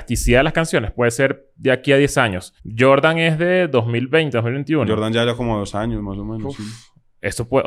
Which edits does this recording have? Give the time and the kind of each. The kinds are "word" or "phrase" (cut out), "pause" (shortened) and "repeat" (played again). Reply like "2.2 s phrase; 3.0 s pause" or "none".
2.6 s pause